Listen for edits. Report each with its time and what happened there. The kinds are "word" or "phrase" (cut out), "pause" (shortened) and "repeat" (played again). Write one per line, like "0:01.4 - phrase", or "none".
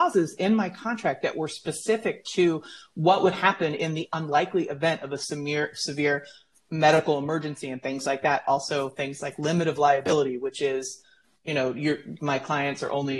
none